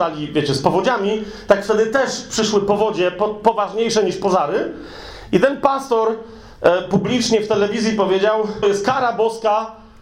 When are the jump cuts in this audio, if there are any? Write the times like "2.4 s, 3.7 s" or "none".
8.6 s